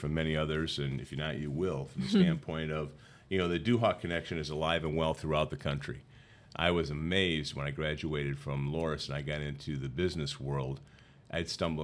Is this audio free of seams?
yes; 0 cuts

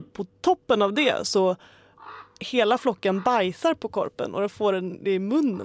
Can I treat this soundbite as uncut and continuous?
yes; 0 cuts

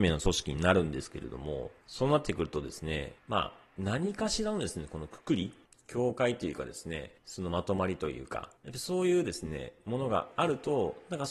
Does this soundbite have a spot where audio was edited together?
yes; 6 cuts; at 1.8 s, 3.2 s, 3.7 s, 5.6 s, 7.2 s, 8.6 s

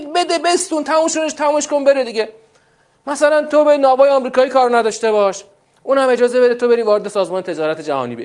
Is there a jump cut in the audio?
no; 0 cuts

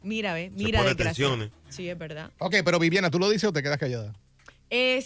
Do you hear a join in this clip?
no; 0 cuts

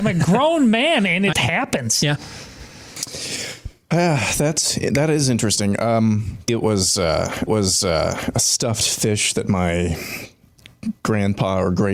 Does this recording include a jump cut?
yes; 3 cuts; at 1.3 s, 6.5 s, 7.5 s

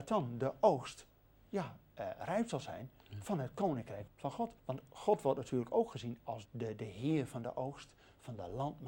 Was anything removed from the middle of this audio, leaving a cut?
yes; 3 cuts; at 4.1 s, 4.6 s, 6.4 s

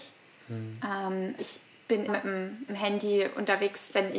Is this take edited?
yes; 3 cuts; at 1.4 s, 2.1 s, 2.7 s

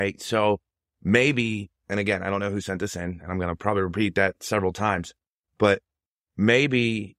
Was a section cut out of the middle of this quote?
no; 0 cuts

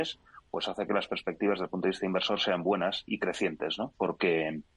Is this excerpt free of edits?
yes; 0 cuts

